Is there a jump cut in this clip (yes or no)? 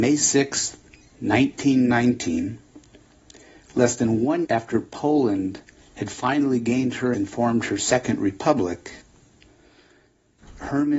yes